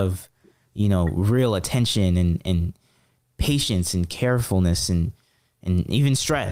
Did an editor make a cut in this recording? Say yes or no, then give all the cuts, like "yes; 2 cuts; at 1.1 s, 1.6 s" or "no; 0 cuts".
no; 0 cuts